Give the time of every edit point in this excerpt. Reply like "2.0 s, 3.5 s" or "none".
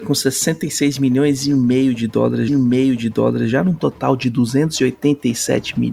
2.5 s